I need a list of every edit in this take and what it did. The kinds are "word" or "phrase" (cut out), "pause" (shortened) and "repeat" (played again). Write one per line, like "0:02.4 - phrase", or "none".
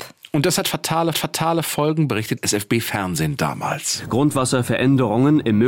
0:01.1 - repeat
0:02.4 - word